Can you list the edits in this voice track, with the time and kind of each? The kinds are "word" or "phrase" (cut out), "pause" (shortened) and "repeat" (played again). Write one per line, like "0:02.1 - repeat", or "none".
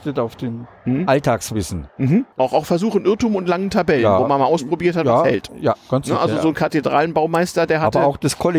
0:02.3 - pause
0:05.8 - pause